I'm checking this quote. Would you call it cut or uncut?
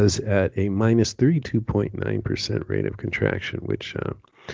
uncut